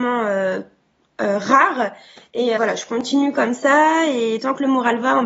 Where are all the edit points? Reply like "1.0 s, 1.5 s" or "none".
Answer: 2.6 s